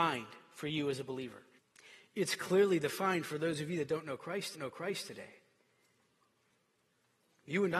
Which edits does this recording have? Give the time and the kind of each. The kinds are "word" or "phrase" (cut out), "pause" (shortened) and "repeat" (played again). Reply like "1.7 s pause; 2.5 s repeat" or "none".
1.6 s pause; 4.5 s repeat